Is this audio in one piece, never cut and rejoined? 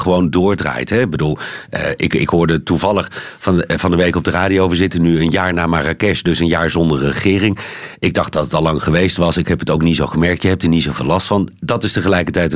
yes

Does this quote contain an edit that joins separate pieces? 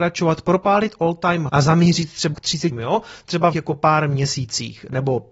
yes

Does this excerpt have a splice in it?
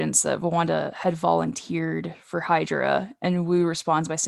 no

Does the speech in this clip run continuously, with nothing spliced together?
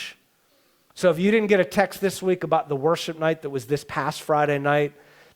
yes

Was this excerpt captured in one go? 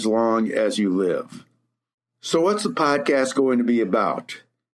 yes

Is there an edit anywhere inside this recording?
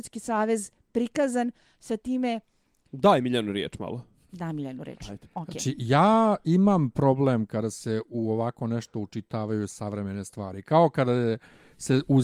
no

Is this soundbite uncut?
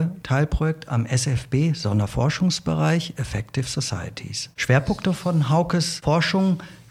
yes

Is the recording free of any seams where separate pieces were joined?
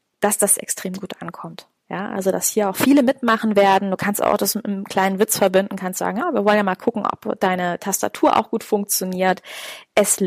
yes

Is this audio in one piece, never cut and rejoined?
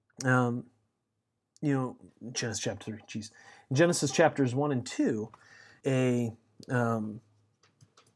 no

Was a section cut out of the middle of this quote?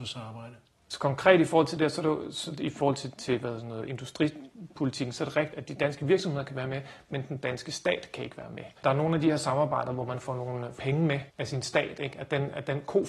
yes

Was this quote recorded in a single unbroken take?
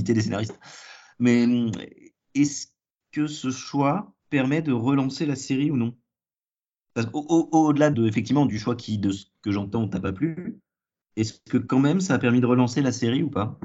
no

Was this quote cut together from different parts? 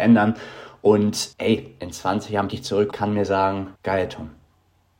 yes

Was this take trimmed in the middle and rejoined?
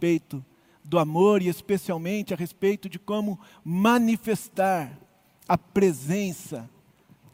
no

